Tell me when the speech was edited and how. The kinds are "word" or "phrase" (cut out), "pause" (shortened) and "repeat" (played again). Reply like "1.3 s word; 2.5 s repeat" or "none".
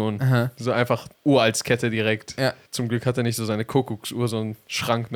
1.2 s pause

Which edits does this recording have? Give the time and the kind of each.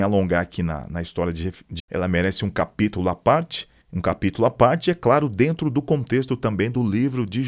1.8 s word; 3.8 s pause

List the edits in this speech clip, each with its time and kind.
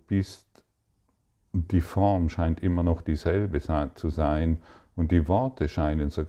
none

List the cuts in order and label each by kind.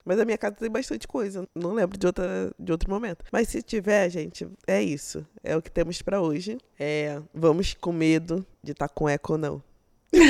1.4 s word; 4.6 s pause; 8.5 s pause

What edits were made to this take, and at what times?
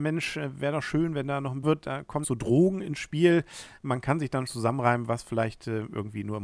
1.6 s phrase; 2.2 s phrase; 4.5 s word

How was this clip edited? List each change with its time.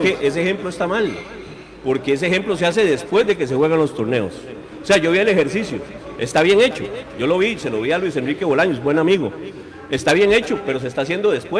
none

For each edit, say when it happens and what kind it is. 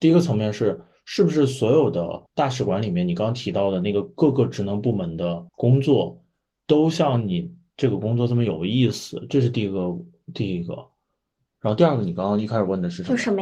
2.3 s pause; 5.5 s pause

